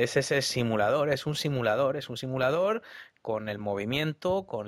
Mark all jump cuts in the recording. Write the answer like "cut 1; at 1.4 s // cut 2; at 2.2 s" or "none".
none